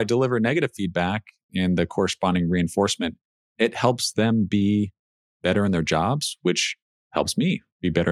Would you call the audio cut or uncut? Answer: uncut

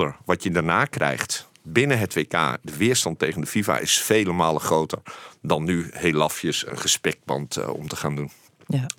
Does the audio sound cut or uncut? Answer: cut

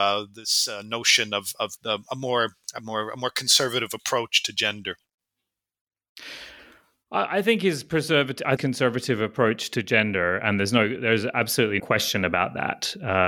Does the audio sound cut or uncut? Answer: cut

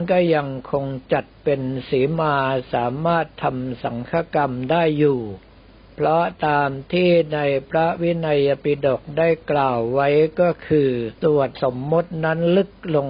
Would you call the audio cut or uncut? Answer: cut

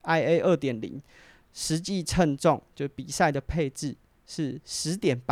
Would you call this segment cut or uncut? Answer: uncut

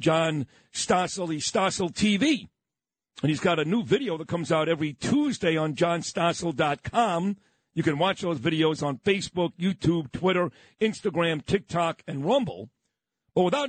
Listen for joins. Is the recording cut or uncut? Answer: uncut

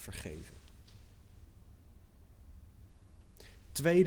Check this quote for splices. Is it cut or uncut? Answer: uncut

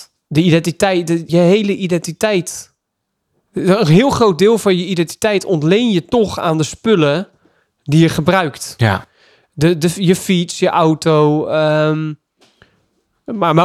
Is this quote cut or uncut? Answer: cut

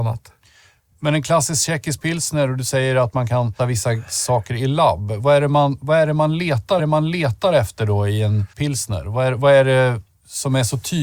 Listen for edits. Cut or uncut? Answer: cut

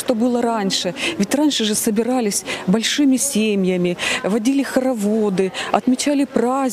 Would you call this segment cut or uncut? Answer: uncut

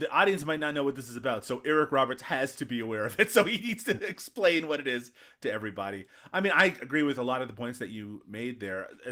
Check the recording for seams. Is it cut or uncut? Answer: uncut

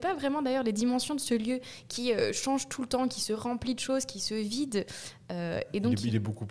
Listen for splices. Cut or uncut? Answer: uncut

